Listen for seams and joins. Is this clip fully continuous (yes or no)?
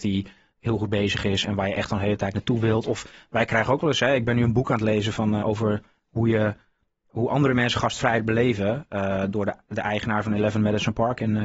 no